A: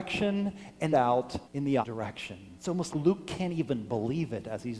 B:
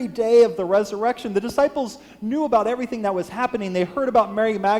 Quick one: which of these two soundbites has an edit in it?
A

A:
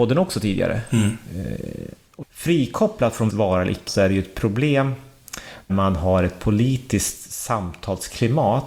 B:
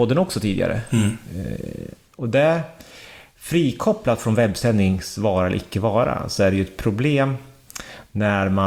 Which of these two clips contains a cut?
A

